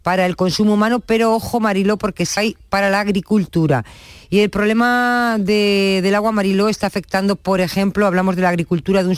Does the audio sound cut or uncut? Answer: cut